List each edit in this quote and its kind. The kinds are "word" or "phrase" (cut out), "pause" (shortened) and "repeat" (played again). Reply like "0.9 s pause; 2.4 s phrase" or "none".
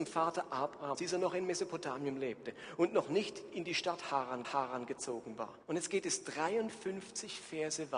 0.9 s word; 4.4 s repeat; 5.6 s pause